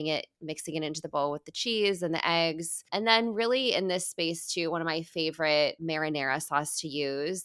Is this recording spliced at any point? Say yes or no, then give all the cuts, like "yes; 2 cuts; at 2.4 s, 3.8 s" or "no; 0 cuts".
no; 0 cuts